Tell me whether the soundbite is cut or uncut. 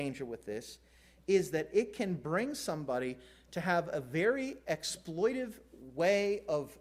uncut